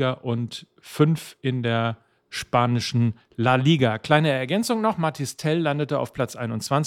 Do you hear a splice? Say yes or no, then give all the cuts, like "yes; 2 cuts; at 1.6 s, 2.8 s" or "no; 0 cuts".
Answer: no; 0 cuts